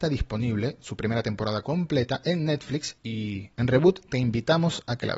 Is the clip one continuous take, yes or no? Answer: no